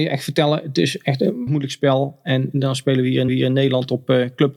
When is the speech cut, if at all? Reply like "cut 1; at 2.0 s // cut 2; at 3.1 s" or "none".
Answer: cut 1; at 1.5 s // cut 2; at 3.3 s